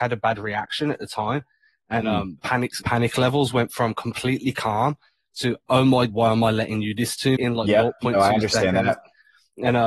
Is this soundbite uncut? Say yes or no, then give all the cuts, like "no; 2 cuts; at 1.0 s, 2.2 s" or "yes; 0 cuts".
no; 5 cuts; at 2.4 s, 2.8 s, 6.1 s, 7.0 s, 7.4 s